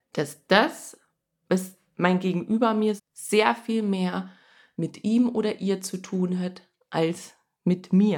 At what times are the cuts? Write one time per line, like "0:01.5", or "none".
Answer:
0:03.0